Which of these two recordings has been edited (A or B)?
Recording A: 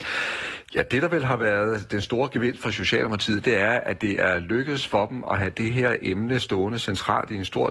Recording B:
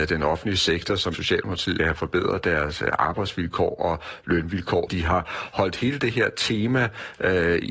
B